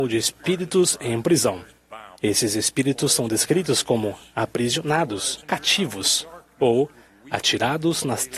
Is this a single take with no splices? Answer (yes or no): no